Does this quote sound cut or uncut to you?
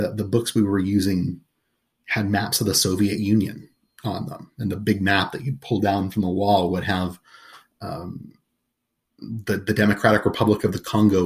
uncut